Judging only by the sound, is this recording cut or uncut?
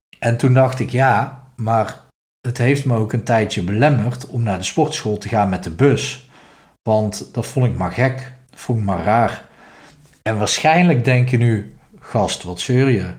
uncut